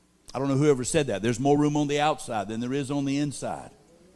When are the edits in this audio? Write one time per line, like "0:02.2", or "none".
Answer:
none